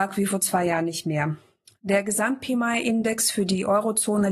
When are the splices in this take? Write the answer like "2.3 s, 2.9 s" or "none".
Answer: none